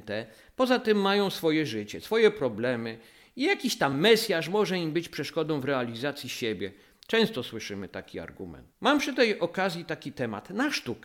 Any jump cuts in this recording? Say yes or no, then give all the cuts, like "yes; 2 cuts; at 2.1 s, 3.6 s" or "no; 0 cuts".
no; 0 cuts